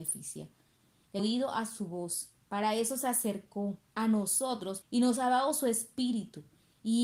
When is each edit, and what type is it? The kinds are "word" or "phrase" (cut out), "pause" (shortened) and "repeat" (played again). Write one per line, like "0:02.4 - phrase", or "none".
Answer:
0:01.2 - phrase
0:02.4 - pause
0:03.9 - pause
0:04.8 - word